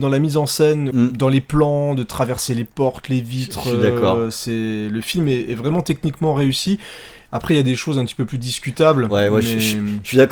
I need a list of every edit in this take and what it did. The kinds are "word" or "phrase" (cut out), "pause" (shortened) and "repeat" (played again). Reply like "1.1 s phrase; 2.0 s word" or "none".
0.9 s word